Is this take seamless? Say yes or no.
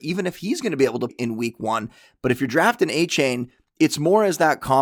no